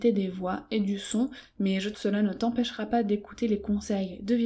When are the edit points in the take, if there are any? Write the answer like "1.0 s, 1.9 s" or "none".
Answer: 1.9 s